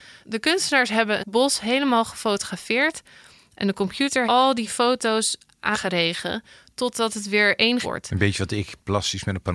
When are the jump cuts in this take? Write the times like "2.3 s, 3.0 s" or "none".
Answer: 1.2 s, 4.2 s, 5.7 s, 7.8 s